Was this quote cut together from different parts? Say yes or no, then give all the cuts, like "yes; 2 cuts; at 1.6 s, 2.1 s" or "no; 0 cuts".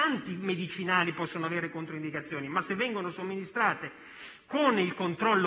no; 0 cuts